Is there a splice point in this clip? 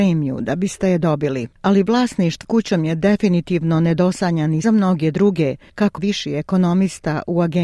yes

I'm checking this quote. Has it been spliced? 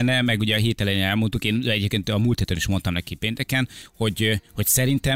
no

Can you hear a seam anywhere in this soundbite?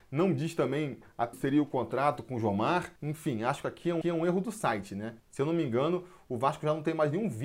yes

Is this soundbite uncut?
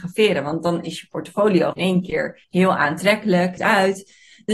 no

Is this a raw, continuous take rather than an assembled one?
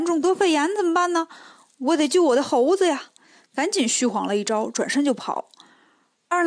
yes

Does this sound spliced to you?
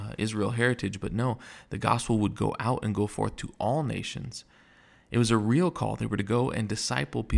no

